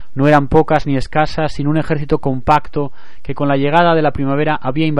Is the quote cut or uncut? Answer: uncut